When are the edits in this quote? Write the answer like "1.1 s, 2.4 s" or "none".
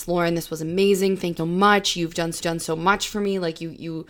1.4 s, 2.4 s